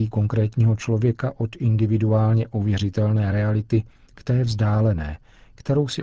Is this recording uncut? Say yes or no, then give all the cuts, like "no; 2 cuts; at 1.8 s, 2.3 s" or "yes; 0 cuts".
yes; 0 cuts